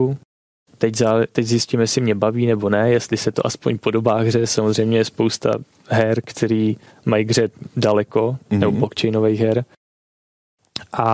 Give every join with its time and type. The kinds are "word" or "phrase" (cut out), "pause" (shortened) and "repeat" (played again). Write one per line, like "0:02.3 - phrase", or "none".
none